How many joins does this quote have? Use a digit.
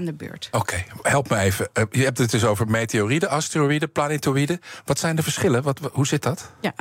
0